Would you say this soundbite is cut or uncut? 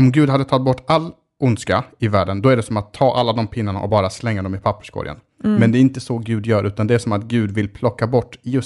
uncut